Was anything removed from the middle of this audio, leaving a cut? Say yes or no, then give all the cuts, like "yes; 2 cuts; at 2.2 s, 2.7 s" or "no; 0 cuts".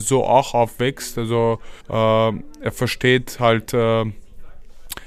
yes; 1 cut; at 1.8 s